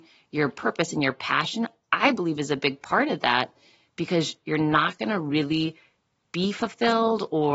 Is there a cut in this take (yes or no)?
no